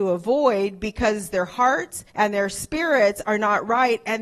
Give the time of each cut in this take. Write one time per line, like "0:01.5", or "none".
0:02.1